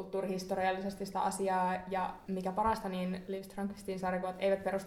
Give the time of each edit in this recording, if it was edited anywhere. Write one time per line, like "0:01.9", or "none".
none